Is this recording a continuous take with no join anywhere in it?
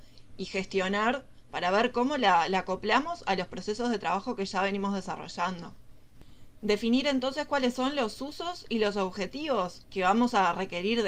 no; 1 cut; at 9.8 s

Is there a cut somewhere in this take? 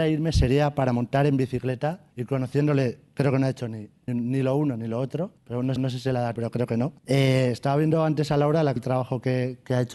yes; 7 cuts; at 2.1 s, 4.1 s, 5.4 s, 5.8 s, 6.4 s, 7.0 s, 8.8 s

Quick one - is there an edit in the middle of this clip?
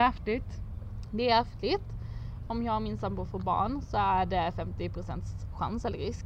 no; 0 cuts

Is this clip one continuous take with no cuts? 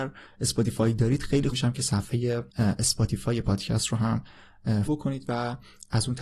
no; 3 cuts; at 1.5 s, 2.5 s, 4.9 s

